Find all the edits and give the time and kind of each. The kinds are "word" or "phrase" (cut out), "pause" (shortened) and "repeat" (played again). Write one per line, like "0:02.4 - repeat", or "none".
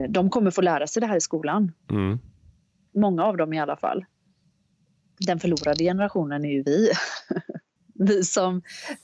0:01.8 - pause